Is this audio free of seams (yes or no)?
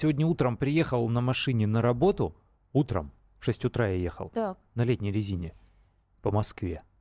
yes